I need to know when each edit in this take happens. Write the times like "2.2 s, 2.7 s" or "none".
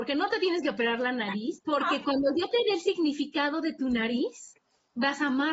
1.6 s